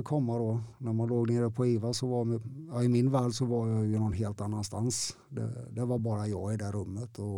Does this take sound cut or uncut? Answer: uncut